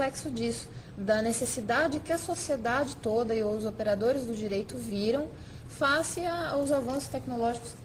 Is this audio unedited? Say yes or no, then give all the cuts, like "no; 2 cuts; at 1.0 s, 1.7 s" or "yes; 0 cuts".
yes; 0 cuts